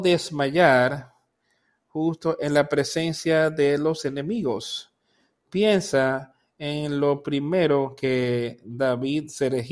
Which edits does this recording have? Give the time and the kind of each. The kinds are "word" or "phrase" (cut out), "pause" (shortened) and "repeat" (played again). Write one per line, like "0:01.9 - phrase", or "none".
none